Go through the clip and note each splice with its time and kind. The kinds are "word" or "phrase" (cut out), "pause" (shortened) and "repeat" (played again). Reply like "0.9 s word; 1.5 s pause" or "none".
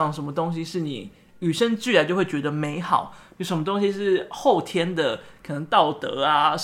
none